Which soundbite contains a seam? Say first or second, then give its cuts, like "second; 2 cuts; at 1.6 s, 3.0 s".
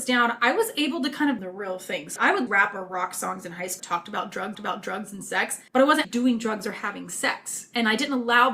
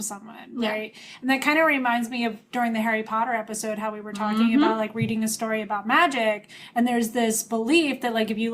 first; 7 cuts; at 1.4 s, 2.2 s, 2.5 s, 3.8 s, 4.5 s, 5.7 s, 6.0 s